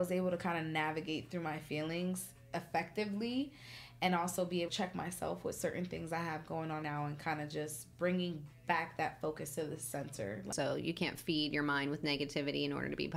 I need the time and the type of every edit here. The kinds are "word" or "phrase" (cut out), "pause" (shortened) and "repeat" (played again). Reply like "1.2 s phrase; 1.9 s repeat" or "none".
4.7 s word; 6.8 s phrase